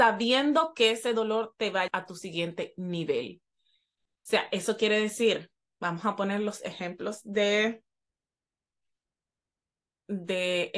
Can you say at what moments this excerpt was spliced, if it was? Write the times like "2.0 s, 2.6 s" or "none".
1.9 s